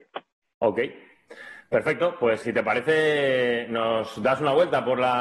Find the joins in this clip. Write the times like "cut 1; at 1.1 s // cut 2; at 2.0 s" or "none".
cut 1; at 2.4 s